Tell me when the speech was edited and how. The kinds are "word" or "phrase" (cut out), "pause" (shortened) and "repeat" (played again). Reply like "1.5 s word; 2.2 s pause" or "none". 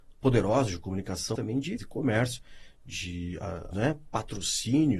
1.3 s word; 1.8 s word; 3.7 s word